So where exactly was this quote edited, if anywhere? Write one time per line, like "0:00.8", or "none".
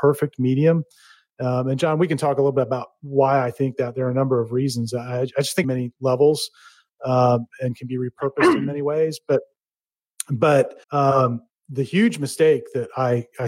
0:05.6
0:10.8